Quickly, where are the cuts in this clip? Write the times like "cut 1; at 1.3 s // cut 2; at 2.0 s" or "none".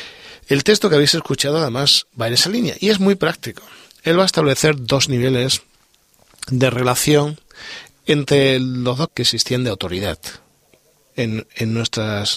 cut 1; at 9.1 s